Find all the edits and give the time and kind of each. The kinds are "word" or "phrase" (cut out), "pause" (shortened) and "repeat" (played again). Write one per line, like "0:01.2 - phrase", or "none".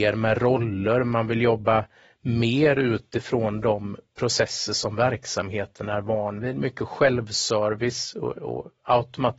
none